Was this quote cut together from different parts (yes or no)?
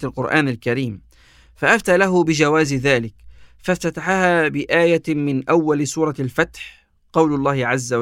no